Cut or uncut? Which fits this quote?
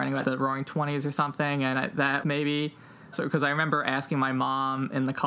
cut